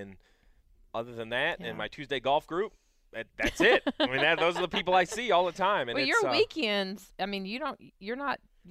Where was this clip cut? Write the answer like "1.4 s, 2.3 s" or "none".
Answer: none